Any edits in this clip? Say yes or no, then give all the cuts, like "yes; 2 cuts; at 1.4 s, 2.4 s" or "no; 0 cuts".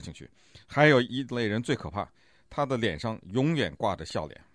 no; 0 cuts